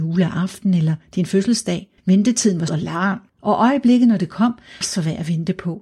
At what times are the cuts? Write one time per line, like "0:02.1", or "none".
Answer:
0:02.0
0:02.7
0:03.3
0:04.8